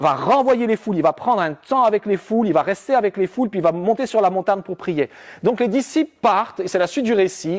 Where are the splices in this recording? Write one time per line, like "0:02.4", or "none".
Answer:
none